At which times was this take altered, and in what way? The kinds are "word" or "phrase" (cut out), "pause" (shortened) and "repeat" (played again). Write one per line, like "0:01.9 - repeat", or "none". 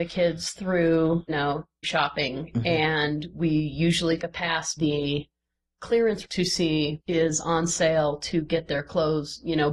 0:01.3 - word
0:01.8 - word
0:04.2 - word
0:04.8 - word
0:06.2 - word
0:07.0 - word